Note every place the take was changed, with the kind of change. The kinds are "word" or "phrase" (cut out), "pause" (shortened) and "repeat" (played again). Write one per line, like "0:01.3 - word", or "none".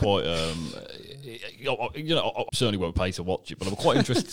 0:02.5 - word

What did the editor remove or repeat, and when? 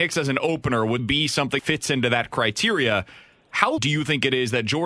0:01.0 - word
0:01.6 - word
0:03.8 - word

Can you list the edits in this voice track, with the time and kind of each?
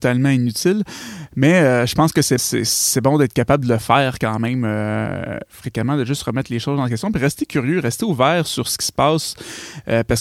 0:02.4 - word

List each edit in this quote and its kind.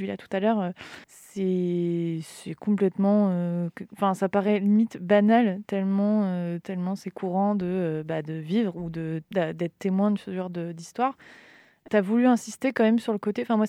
0:01.0 - pause
0:09.3 - pause
0:11.9 - word

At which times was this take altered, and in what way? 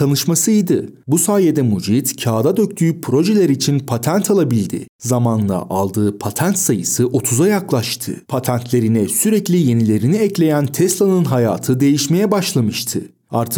0:08.2 - pause

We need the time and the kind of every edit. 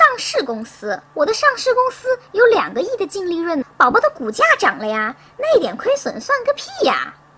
0:01.1 - pause
0:03.6 - word

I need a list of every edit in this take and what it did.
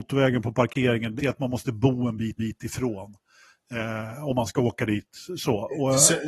0:01.2 - phrase
0:02.4 - repeat

